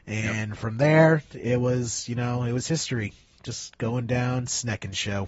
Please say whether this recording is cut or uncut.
uncut